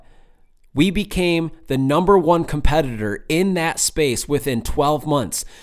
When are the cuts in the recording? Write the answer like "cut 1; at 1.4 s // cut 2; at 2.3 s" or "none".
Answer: none